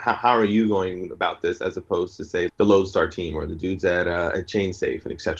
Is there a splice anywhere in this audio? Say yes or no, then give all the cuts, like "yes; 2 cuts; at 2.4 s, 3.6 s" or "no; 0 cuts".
yes; 1 cut; at 2.5 s